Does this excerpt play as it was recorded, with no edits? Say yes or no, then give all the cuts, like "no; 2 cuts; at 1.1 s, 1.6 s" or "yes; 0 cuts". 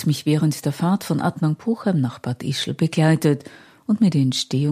yes; 0 cuts